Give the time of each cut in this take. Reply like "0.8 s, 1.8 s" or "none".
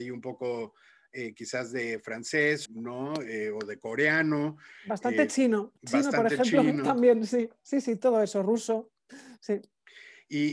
2.7 s, 5.8 s